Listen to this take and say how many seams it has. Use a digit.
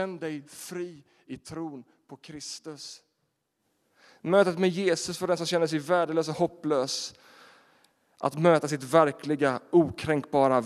0